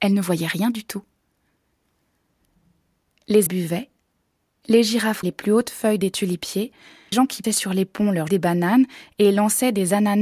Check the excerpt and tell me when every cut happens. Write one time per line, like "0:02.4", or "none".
0:03.5
0:05.2
0:07.1
0:07.4
0:08.3

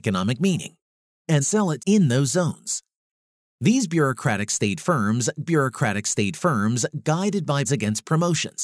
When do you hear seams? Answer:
0:01.4
0:01.8
0:05.5
0:07.6

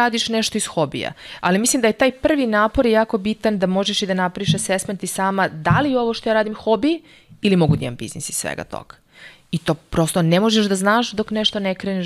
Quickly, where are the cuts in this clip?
none

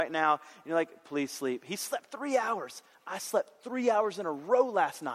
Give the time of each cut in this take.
none

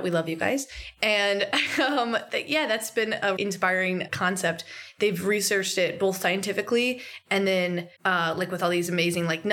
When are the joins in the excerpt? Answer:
0:03.4
0:08.0

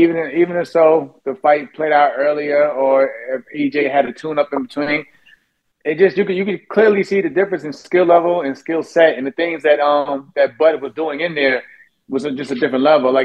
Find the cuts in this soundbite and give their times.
none

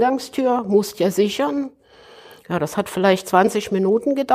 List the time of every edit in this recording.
none

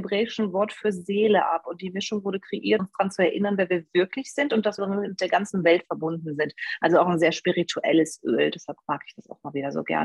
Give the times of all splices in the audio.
0:02.8
0:04.8

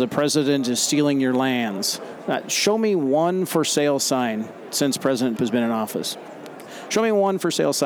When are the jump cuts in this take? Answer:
0:05.4

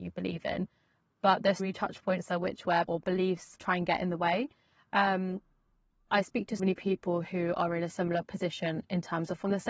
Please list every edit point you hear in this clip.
0:01.6
0:02.9
0:06.1
0:06.6

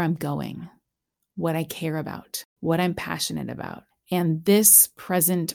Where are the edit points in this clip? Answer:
0:02.5
0:03.9

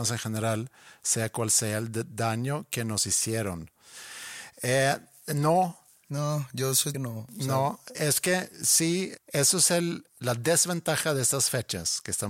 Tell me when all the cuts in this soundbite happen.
0:05.9
0:06.9
0:07.9
0:10.1

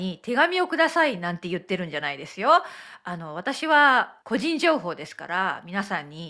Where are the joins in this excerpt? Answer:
0:04.2

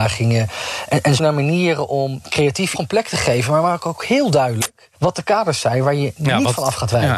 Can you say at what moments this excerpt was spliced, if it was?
0:01.2
0:02.7
0:04.9

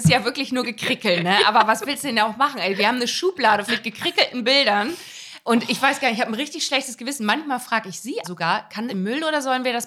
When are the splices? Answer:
0:03.7
0:08.2
0:08.9

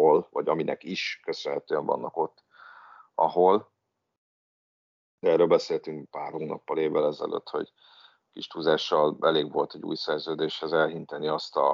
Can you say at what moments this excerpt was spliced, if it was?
none

